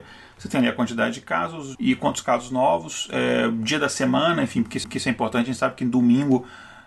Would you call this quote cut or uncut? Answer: cut